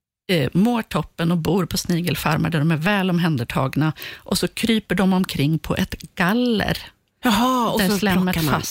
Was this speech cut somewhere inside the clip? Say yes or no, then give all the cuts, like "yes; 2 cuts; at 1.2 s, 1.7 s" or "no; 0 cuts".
no; 0 cuts